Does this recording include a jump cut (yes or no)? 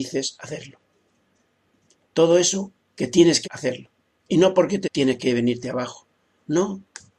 yes